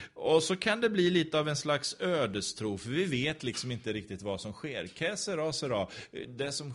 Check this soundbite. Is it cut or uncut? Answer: uncut